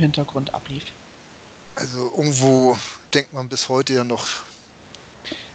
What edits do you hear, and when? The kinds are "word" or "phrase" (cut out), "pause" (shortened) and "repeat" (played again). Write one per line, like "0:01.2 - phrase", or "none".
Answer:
0:03.1 - pause